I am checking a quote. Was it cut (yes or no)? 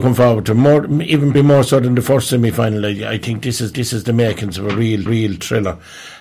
yes